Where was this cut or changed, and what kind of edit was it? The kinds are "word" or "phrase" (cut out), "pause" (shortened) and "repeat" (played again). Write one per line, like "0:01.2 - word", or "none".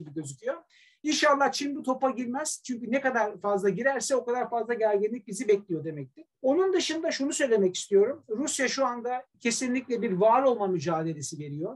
0:06.3 - pause
0:09.3 - pause